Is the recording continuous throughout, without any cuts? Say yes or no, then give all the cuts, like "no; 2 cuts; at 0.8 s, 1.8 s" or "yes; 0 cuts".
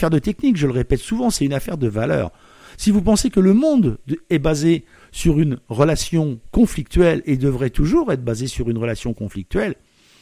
yes; 0 cuts